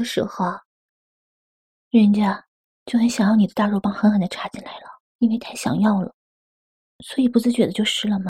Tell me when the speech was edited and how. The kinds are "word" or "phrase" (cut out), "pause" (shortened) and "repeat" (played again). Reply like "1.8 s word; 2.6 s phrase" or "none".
5.1 s pause